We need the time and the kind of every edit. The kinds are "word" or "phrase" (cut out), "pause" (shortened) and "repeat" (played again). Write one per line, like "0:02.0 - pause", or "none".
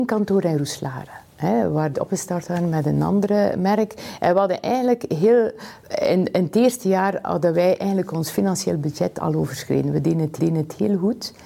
0:01.9 - phrase
0:05.8 - pause
0:10.4 - repeat